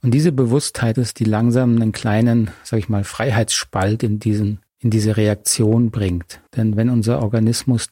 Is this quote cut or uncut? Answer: cut